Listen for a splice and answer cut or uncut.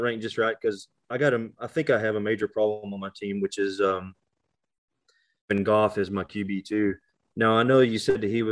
uncut